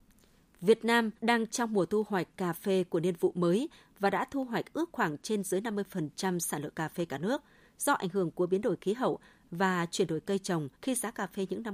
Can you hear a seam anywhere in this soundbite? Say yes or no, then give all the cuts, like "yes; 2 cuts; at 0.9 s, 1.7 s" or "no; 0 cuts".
yes; 2 cuts; at 1.2 s, 10.7 s